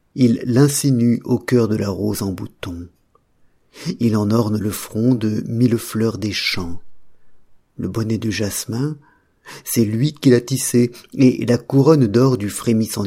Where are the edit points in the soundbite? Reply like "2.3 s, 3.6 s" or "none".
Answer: none